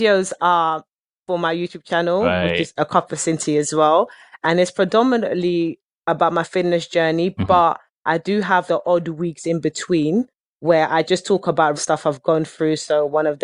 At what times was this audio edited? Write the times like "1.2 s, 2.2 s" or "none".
8.7 s, 10.4 s, 11.8 s